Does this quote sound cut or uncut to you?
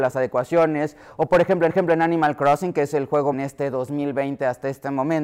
cut